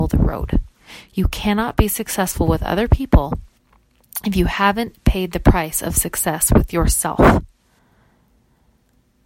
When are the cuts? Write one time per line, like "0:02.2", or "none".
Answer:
none